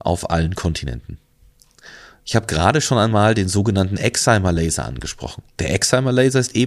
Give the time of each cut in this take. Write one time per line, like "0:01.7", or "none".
none